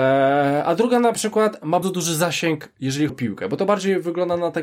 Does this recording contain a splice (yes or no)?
yes